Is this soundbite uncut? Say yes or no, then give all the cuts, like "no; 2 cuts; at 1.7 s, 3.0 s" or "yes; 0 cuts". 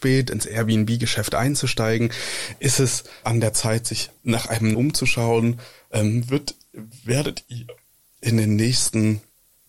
no; 3 cuts; at 3.2 s, 4.2 s, 4.7 s